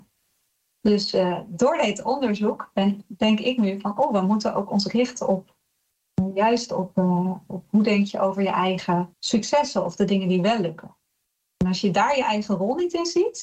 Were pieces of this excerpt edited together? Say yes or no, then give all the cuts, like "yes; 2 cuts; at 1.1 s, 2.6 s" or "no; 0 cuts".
yes; 1 cut; at 9.1 s